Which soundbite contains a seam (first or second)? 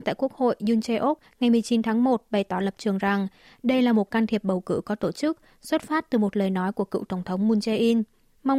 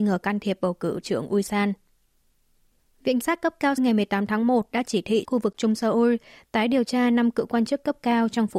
second